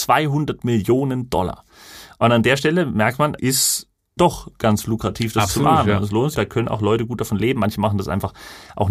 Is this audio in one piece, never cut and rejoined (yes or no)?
no